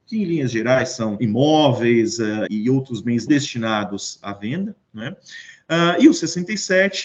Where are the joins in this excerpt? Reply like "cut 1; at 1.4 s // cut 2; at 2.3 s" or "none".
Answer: cut 1; at 1.2 s // cut 2; at 2.5 s // cut 3; at 3.3 s